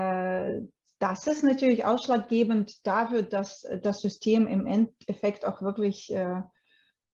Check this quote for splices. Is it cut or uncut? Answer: uncut